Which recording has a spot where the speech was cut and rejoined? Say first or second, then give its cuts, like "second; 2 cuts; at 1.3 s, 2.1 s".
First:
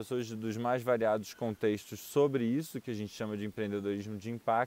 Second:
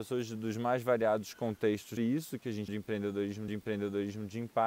second; 3 cuts; at 2.0 s, 2.7 s, 3.5 s